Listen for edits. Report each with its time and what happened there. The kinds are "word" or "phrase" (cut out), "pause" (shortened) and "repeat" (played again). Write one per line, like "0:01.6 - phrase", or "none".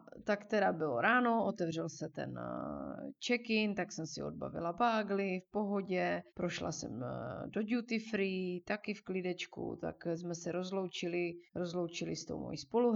0:06.3 - pause
0:11.5 - pause